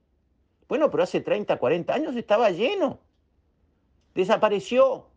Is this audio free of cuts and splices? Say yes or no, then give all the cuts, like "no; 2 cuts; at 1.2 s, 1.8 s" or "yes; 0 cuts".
yes; 0 cuts